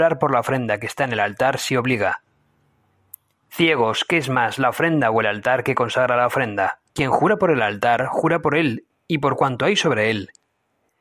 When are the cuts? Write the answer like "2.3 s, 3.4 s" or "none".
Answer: 6.9 s